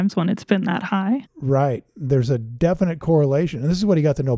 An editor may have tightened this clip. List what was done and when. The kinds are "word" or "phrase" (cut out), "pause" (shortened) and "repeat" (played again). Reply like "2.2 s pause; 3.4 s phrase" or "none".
none